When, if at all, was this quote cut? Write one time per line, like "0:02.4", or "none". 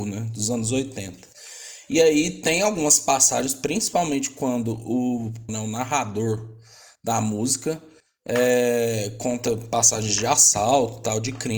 0:05.5

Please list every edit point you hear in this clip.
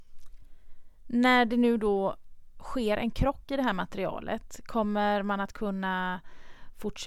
none

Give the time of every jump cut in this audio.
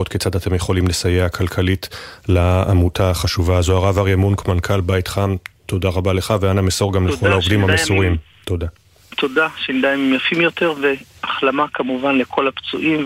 none

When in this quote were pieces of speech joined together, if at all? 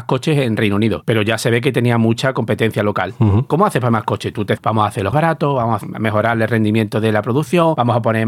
0:03.9
0:04.6
0:05.1

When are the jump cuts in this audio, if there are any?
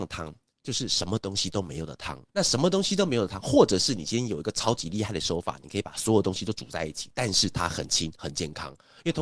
0:02.3

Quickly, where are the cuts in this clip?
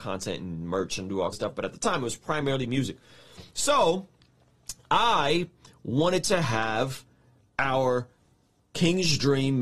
0:01.3

